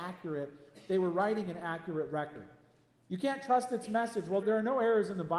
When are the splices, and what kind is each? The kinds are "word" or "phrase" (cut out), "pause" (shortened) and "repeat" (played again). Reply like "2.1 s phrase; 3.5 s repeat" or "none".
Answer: 4.4 s word